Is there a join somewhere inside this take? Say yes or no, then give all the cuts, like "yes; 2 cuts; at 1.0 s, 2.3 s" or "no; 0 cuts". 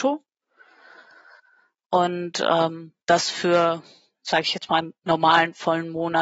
yes; 1 cut; at 3.0 s